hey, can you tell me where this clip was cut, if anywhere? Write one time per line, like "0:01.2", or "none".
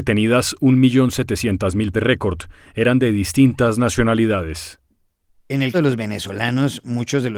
0:01.9
0:05.7

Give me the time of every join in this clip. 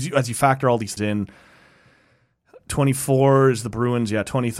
0:01.0

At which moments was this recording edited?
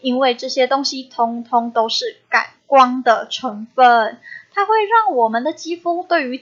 none

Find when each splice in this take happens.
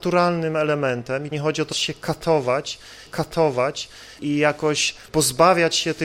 0:01.3
0:01.7
0:03.1

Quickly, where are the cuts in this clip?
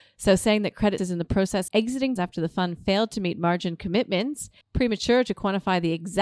0:01.0
0:01.7
0:02.2
0:04.6

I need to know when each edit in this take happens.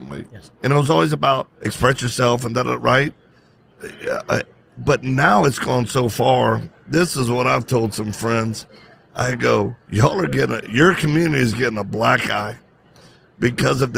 0:01.5

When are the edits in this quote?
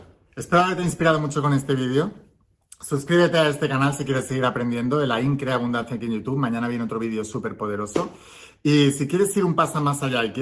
none

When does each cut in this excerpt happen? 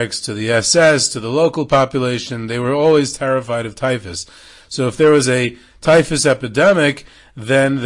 none

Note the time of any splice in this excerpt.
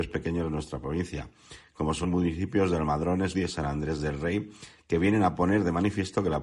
0:02.0
0:03.3

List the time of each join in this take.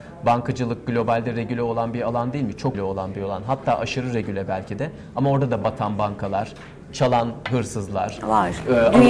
0:02.7

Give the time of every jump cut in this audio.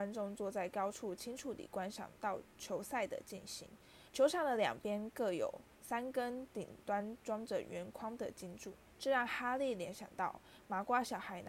0:02.5
0:04.1

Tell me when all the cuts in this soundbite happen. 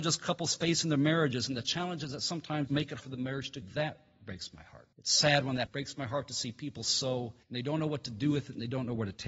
0:02.7
0:03.0
0:03.6
0:04.9
0:05.7
0:06.8
0:07.4

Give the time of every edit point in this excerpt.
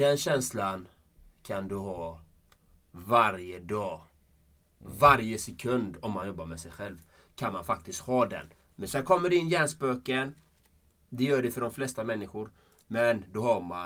none

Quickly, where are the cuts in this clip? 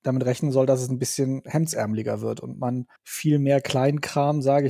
0:03.0

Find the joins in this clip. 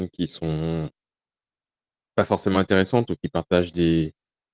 none

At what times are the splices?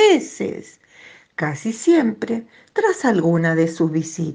none

